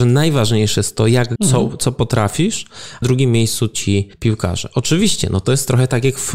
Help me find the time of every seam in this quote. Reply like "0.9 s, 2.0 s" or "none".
1.4 s, 3.0 s, 4.1 s